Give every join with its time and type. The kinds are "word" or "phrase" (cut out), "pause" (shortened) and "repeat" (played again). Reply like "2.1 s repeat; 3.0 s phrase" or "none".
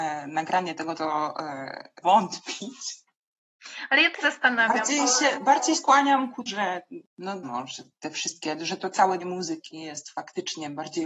0.9 s word; 2.0 s word; 4.2 s word; 5.7 s word; 6.5 s word; 7.4 s word; 8.6 s word; 9.2 s word